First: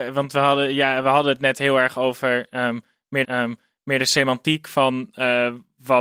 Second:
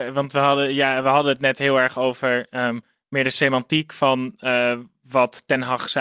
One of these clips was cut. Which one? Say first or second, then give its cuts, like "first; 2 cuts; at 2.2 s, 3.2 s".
first; 1 cut; at 3.2 s